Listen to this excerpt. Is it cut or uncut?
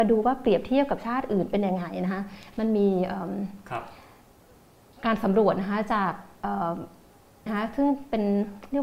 cut